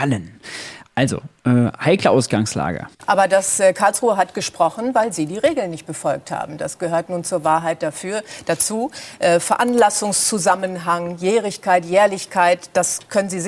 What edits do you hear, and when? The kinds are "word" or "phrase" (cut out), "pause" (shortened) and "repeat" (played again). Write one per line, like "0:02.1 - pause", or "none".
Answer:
0:02.9 - pause